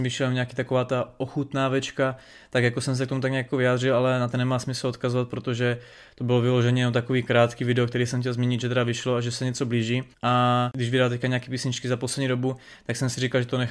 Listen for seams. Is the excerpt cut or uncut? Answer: cut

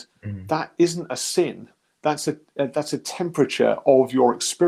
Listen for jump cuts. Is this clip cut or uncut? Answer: uncut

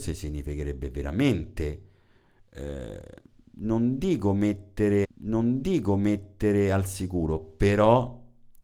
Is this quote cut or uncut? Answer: cut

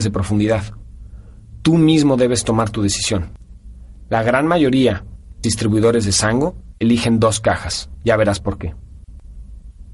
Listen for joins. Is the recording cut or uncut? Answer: cut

